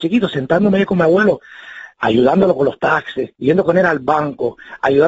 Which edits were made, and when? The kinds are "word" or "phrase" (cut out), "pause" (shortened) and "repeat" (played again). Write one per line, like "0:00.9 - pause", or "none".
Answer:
0:01.9 - pause
0:03.3 - pause